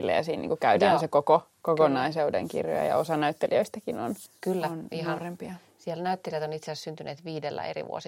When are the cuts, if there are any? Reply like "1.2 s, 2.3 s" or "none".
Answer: 4.3 s